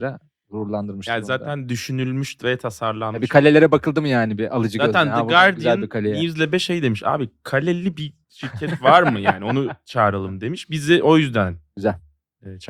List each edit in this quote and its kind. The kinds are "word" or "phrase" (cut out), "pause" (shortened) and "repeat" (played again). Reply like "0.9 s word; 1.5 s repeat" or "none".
8.2 s pause